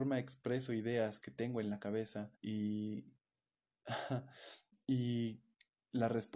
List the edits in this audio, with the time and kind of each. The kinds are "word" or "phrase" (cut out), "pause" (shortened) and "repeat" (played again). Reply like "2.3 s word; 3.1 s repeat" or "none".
2.3 s pause